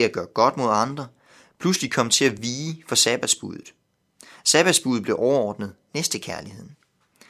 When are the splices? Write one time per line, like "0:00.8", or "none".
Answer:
none